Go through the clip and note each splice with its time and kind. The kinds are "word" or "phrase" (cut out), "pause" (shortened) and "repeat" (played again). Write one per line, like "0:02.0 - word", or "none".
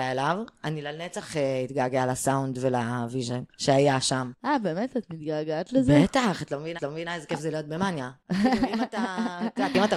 0:03.5 - pause
0:06.8 - repeat

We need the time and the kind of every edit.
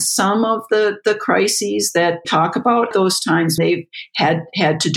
0:02.2 - word
0:02.9 - word
0:03.6 - word

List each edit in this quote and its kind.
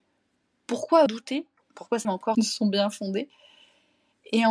0:01.1 - phrase
0:02.0 - word
0:02.3 - phrase

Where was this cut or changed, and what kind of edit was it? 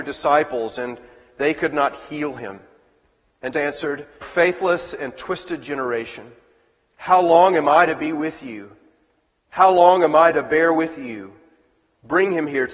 0:03.5 - word
0:04.2 - word

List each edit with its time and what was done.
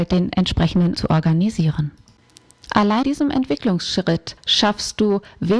0:01.0 - word
0:03.0 - word
0:04.4 - pause

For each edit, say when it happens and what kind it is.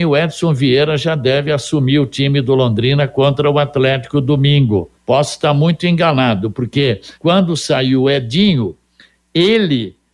0:04.9 - pause
0:07.1 - pause

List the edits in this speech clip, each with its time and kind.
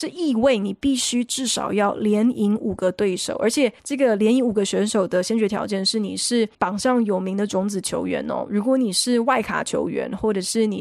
0:03.8 - pause
0:06.5 - pause

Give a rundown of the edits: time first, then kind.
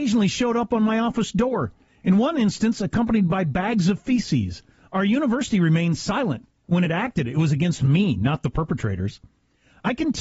none

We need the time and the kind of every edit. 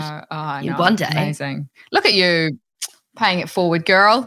none

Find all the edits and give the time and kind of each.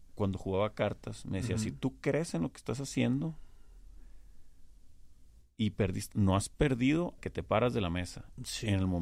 0:06.1 - word
0:07.2 - word

